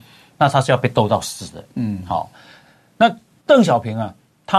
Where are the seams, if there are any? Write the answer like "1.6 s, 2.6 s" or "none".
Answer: none